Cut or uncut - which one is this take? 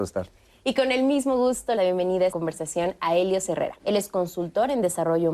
cut